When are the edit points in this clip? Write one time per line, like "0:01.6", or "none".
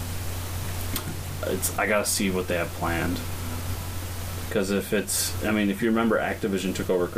none